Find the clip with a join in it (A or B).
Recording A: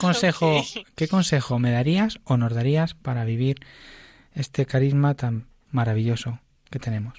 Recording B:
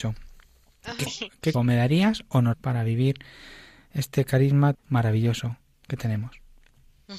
B